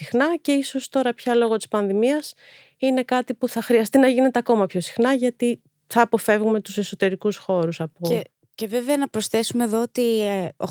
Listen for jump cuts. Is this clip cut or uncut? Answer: uncut